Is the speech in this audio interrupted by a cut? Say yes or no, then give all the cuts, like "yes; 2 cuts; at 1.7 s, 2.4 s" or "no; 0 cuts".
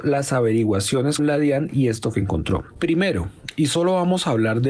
yes; 2 cuts; at 1.2 s, 2.1 s